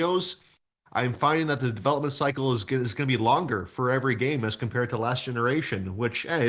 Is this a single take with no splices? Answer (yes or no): yes